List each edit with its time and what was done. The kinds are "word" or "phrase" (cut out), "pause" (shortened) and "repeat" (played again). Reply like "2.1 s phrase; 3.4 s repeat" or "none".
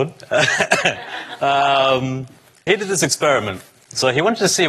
2.7 s word